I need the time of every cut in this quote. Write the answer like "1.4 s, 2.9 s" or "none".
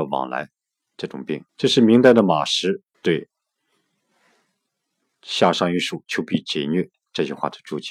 1.5 s, 2.9 s